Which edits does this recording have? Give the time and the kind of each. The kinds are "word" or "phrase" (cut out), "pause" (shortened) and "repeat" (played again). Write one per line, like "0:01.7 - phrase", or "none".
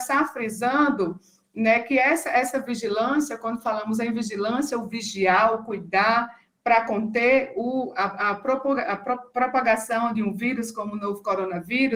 none